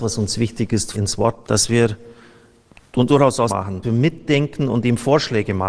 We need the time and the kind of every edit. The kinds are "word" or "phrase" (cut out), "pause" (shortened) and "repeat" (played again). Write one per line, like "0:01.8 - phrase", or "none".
0:00.9 - word
0:01.4 - word
0:03.1 - word
0:03.5 - word
0:03.8 - word